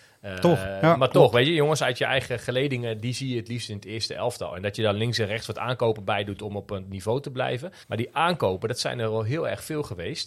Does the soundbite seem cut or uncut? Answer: cut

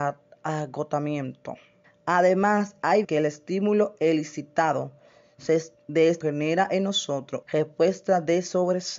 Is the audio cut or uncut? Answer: cut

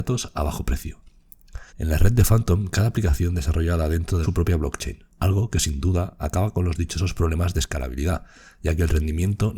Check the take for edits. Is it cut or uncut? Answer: cut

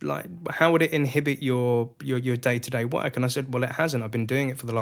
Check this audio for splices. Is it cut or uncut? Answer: uncut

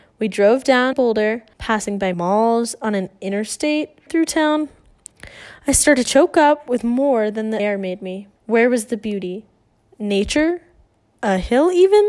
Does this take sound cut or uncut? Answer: cut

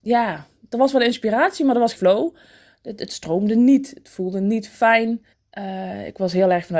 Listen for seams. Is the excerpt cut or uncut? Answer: cut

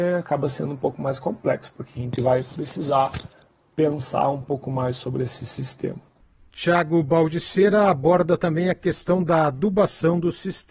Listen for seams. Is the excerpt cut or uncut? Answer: uncut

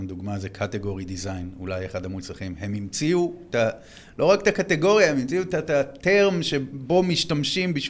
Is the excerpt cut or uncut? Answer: uncut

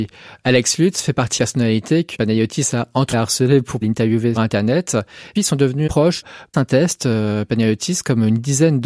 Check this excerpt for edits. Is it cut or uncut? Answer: cut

